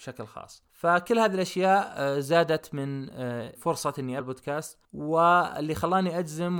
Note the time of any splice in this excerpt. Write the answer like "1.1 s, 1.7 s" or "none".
3.5 s, 4.2 s